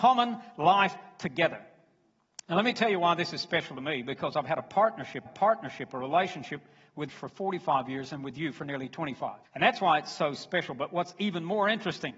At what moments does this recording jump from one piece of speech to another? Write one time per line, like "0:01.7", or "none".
0:02.4
0:05.3
0:07.1
0:09.4